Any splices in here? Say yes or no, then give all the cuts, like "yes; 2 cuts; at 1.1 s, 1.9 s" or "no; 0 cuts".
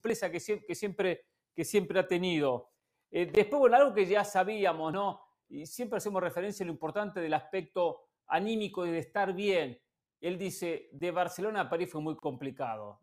no; 0 cuts